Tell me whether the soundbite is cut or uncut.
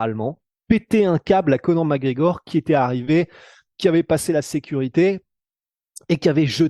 uncut